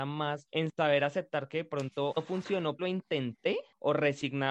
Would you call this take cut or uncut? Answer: cut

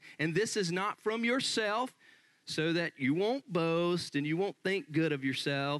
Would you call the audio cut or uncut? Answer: uncut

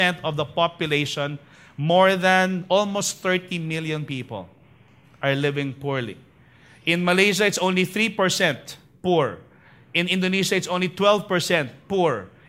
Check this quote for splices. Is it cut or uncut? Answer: uncut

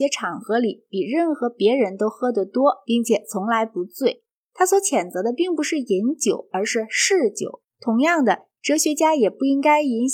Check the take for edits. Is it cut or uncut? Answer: cut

